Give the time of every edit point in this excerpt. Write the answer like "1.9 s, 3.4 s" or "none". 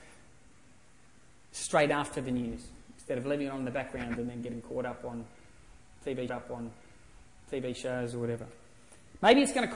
6.3 s